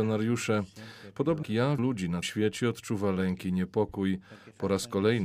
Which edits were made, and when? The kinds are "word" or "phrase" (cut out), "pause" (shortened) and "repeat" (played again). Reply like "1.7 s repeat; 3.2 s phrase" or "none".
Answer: 1.4 s word; 1.8 s word; 2.2 s word